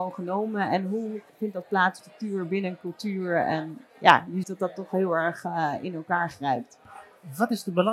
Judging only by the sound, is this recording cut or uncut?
cut